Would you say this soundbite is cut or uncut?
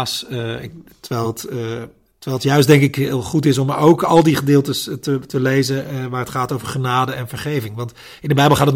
uncut